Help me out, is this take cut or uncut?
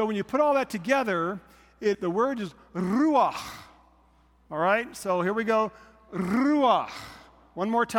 cut